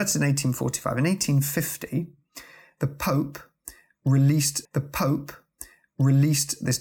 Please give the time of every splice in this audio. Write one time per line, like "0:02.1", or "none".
0:04.6

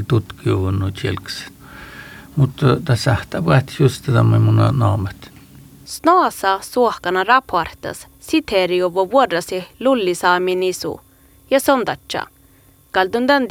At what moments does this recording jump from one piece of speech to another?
none

